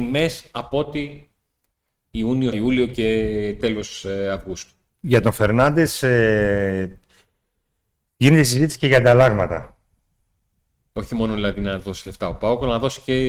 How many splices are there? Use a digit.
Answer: 1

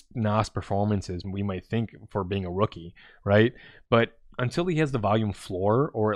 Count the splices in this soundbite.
1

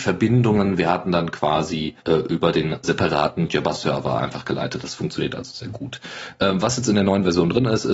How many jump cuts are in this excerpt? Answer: 2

